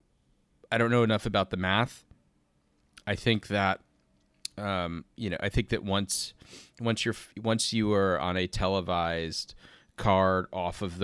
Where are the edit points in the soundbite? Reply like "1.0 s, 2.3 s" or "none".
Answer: none

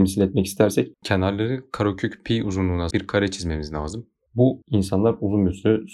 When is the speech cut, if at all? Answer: 0.9 s, 2.9 s, 4.6 s

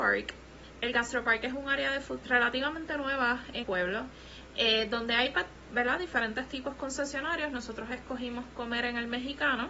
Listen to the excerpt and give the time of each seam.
2.2 s, 3.6 s

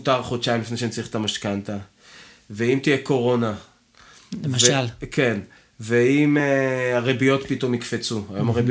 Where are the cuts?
none

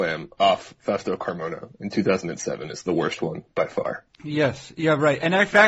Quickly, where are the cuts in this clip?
4.1 s

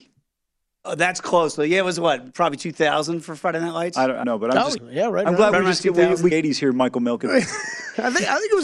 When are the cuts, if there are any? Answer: 4.2 s, 4.8 s, 6.3 s

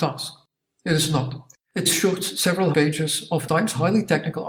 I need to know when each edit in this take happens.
1.9 s, 2.7 s, 3.5 s

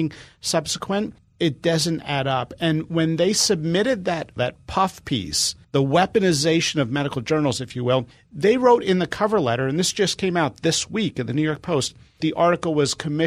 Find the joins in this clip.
1.2 s, 4.4 s, 5.6 s, 8.1 s, 12.2 s

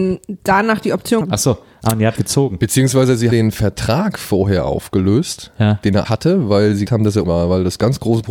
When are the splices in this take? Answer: 1.2 s, 2.2 s, 3.3 s, 6.0 s, 6.9 s, 7.2 s

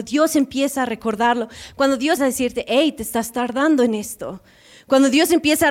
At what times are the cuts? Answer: 2.2 s

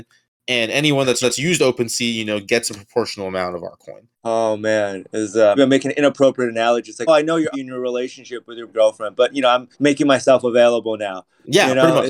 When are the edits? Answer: 1.2 s, 4.1 s, 5.6 s, 7.1 s, 7.5 s, 8.7 s, 9.7 s

